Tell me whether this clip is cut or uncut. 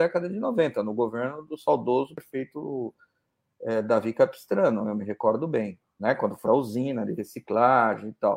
cut